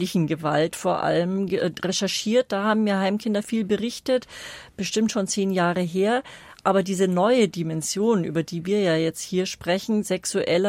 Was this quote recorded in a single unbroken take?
yes; 0 cuts

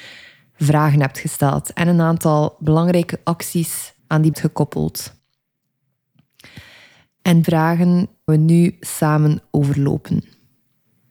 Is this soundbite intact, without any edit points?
no; 4 cuts; at 4.0 s, 4.3 s, 7.4 s, 8.3 s

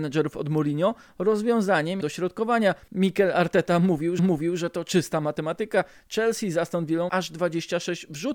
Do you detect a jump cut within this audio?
yes; 3 cuts; at 2.0 s, 4.2 s, 7.1 s

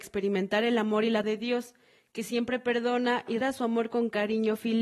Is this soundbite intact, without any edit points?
no; 2 cuts; at 1.2 s, 3.4 s

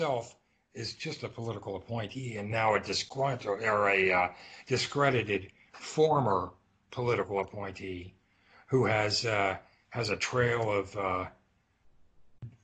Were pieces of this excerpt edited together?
no; 0 cuts

